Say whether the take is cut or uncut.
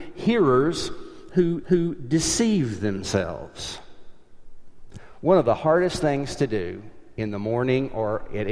cut